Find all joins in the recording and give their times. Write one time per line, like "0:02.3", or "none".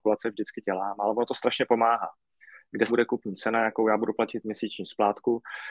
0:02.9